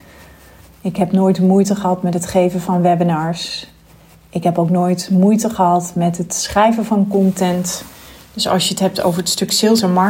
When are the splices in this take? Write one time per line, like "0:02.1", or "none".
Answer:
none